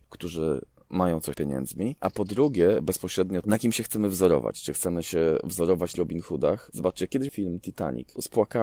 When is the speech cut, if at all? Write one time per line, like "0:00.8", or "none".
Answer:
0:01.3
0:05.9
0:07.3